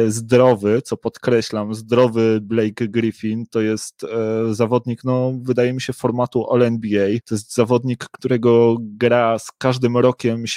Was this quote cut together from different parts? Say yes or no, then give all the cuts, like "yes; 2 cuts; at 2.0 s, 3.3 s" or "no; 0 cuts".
no; 0 cuts